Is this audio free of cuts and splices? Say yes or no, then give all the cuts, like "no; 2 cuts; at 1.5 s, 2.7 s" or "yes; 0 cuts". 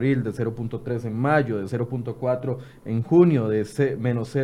yes; 0 cuts